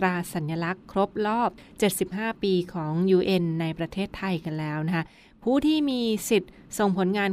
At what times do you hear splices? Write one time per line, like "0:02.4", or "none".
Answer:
none